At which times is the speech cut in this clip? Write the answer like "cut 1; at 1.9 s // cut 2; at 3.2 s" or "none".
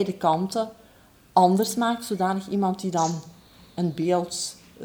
none